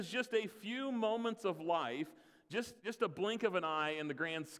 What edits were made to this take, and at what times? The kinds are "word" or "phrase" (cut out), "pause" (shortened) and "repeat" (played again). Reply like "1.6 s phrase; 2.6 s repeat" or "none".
2.8 s word